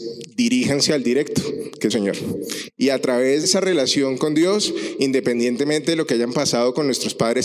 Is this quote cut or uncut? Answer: cut